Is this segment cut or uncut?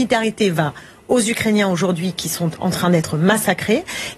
uncut